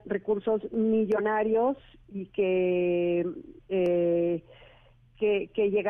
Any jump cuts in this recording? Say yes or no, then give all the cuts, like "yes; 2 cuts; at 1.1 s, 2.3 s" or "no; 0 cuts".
no; 0 cuts